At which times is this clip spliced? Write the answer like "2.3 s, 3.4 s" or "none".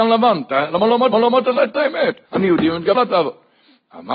1.1 s, 2.2 s, 2.9 s